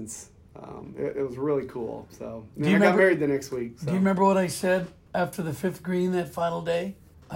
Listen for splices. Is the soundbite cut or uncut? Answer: uncut